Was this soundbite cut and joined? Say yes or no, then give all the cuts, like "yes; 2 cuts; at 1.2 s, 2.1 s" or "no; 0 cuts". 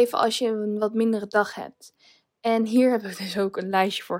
no; 0 cuts